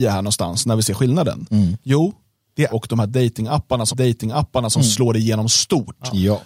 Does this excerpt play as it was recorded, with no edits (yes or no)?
no